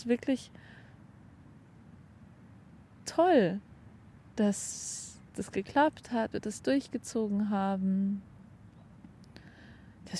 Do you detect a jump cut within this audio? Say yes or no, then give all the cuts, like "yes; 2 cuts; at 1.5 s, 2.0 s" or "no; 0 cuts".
yes; 3 cuts; at 3.0 s, 5.3 s, 6.3 s